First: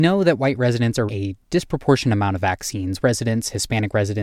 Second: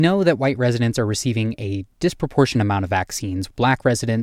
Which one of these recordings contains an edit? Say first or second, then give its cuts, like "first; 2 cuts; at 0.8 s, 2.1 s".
first; 2 cuts; at 1.1 s, 3.0 s